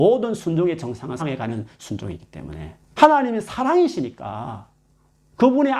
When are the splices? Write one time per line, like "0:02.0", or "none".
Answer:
0:01.2
0:02.8